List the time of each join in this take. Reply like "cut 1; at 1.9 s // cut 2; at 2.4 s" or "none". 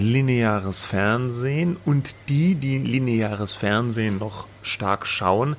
none